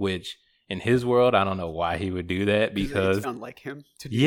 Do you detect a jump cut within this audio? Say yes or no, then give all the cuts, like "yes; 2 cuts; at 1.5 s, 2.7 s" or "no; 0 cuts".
yes; 1 cut; at 3.2 s